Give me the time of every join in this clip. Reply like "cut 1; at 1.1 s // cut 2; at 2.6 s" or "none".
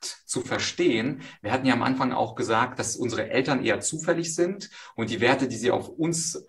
none